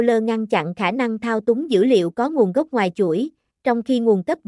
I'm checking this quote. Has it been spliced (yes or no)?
no